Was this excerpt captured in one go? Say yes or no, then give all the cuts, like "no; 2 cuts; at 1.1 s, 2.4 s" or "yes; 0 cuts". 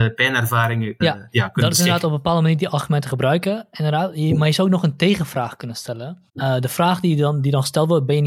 no; 2 cuts; at 1.0 s, 6.3 s